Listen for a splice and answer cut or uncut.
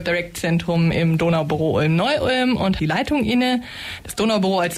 cut